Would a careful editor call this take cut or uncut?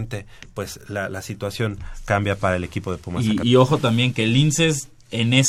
cut